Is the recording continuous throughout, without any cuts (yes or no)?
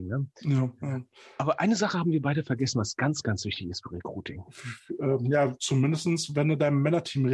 yes